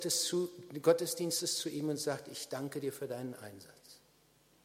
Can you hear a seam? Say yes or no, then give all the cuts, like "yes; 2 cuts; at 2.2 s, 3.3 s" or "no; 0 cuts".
no; 0 cuts